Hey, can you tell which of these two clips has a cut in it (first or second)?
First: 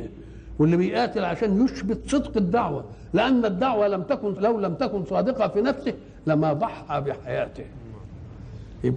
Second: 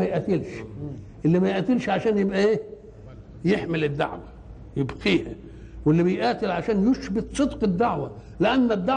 first